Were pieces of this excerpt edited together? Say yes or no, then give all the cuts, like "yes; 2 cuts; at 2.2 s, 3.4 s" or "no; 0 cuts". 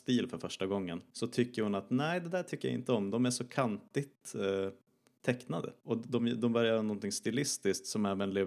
no; 0 cuts